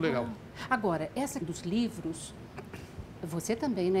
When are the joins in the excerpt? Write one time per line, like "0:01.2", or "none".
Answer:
0:01.4